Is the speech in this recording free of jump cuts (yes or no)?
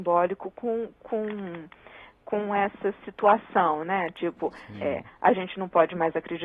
yes